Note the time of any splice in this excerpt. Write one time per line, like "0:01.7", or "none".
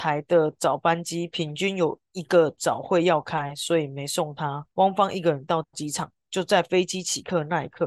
0:02.1
0:04.7